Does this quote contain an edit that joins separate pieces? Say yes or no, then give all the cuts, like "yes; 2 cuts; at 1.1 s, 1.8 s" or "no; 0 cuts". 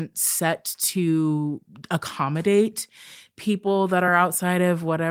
no; 0 cuts